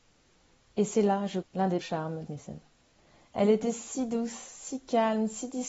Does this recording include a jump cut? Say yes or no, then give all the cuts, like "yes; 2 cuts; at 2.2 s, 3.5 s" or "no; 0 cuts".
yes; 3 cuts; at 1.4 s, 1.8 s, 2.3 s